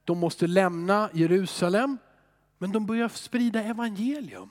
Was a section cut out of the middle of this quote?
no; 0 cuts

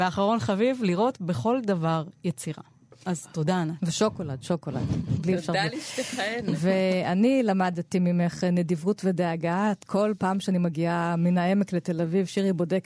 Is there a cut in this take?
no; 0 cuts

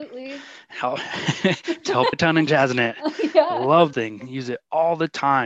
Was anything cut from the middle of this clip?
yes; 3 cuts; at 2.1 s, 2.5 s, 3.9 s

